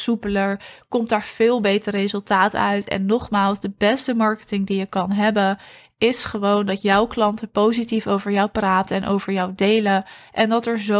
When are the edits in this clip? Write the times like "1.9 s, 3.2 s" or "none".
none